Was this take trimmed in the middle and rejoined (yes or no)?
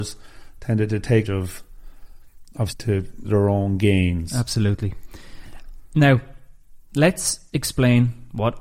yes